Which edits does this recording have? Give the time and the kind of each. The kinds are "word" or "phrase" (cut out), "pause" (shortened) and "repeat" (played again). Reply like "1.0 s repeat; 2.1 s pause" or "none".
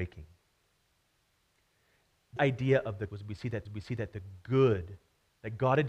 2.4 s word; 3.1 s word; 3.7 s repeat